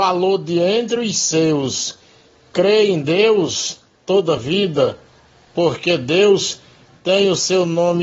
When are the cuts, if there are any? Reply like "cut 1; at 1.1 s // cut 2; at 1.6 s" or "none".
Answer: none